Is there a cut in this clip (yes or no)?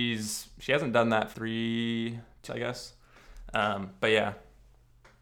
yes